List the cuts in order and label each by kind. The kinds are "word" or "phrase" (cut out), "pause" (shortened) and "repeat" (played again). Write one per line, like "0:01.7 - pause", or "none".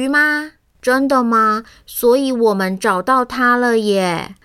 none